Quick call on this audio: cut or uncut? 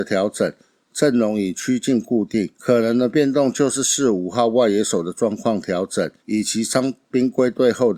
cut